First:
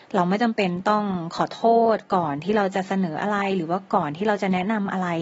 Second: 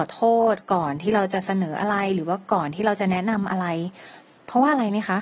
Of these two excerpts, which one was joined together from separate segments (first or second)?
second